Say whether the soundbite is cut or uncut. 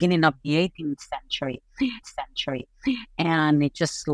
cut